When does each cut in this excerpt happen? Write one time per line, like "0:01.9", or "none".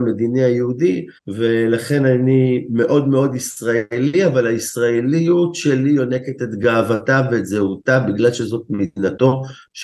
0:01.2